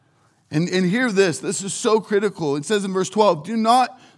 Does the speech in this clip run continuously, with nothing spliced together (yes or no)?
yes